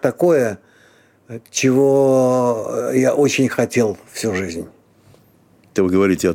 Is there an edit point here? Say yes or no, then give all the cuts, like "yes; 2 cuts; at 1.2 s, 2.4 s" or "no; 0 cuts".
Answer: no; 0 cuts